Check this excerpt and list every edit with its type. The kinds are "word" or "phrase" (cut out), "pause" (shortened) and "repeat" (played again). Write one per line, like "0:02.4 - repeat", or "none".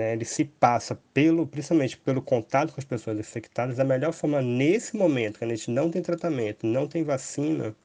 none